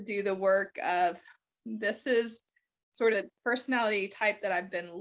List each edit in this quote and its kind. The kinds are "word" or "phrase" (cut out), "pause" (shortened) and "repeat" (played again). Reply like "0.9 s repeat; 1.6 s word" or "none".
1.5 s word; 3.1 s word